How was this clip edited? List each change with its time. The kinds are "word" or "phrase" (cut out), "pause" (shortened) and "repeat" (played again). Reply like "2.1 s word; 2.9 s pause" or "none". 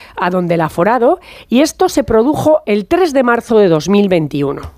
none